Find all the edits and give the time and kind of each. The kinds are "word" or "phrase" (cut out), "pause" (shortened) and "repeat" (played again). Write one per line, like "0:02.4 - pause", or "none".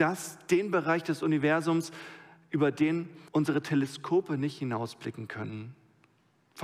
0:03.3 - pause